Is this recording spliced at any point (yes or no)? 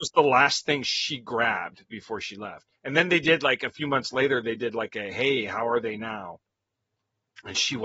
yes